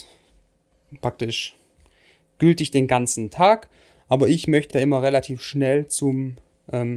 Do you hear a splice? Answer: yes; 1 cut; at 4.7 s

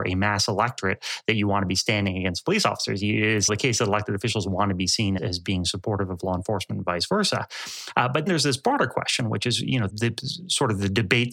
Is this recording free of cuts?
no; 4 cuts; at 3.5 s, 5.2 s, 8.3 s, 9.9 s

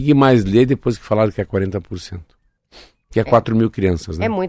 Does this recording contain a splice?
no; 0 cuts

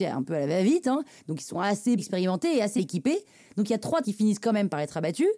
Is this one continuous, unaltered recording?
no; 3 cuts; at 2.0 s, 2.8 s, 4.0 s

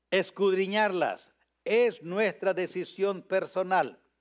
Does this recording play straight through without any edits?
yes; 0 cuts

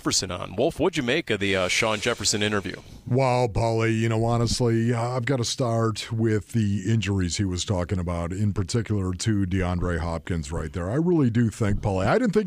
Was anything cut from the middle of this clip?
no; 0 cuts

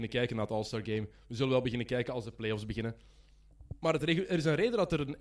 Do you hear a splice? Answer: no; 0 cuts

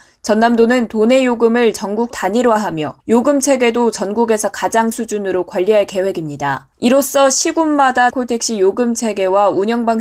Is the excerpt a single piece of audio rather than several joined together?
no; 5 cuts; at 2.1 s, 3.0 s, 4.9 s, 6.7 s, 8.1 s

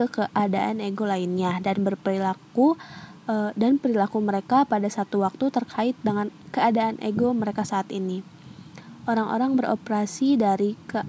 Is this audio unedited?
yes; 0 cuts

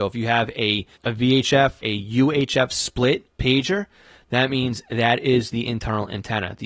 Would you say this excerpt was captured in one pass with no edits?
no; 3 cuts; at 1.0 s, 1.8 s, 3.3 s

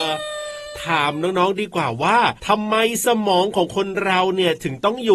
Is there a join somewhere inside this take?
yes; 1 cut; at 2.4 s

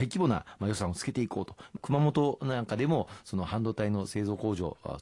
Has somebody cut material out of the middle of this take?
yes; 1 cut; at 1.8 s

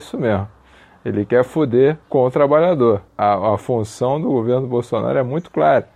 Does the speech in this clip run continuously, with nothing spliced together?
no; 2 cuts; at 2.0 s, 3.1 s

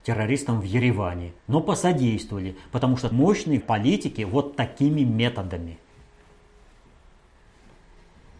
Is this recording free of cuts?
no; 3 cuts; at 1.4 s, 3.1 s, 3.6 s

